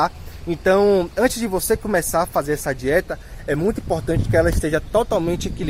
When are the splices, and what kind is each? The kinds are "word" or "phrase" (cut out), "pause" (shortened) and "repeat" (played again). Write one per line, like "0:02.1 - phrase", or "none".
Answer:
none